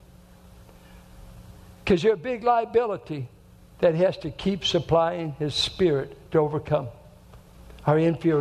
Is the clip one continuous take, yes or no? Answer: yes